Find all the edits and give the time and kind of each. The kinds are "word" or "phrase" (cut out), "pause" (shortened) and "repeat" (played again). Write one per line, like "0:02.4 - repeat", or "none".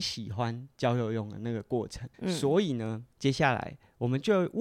0:02.1 - pause
0:03.1 - pause